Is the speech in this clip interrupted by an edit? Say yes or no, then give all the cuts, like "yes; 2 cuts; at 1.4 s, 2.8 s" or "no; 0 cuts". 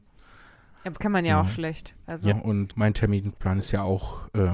yes; 3 cuts; at 0.9 s, 2.3 s, 2.7 s